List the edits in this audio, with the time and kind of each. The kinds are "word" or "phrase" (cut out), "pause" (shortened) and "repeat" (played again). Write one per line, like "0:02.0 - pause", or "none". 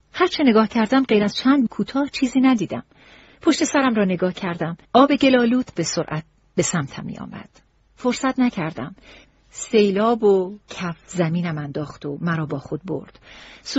0:01.7 - word
0:04.8 - pause
0:05.8 - phrase
0:10.7 - word